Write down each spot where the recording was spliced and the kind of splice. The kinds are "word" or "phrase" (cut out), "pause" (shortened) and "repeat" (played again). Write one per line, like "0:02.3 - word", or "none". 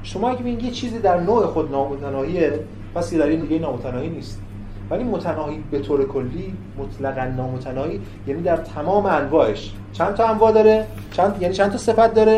0:03.4 - word